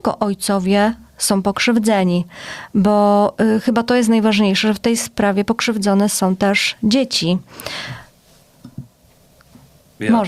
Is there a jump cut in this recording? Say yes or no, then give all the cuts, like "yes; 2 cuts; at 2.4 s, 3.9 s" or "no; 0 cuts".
no; 0 cuts